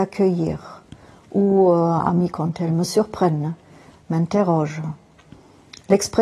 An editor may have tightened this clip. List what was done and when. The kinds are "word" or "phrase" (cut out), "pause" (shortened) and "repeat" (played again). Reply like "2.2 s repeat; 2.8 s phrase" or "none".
2.3 s word